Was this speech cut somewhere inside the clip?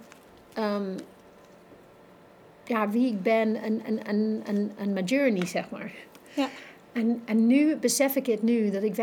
no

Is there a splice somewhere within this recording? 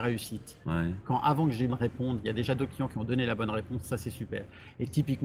yes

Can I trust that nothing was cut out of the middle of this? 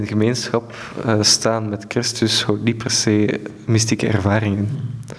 yes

